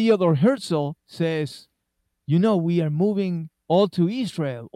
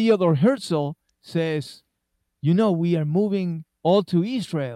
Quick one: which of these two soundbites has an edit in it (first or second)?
first